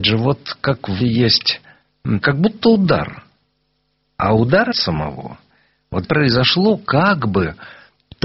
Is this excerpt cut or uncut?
cut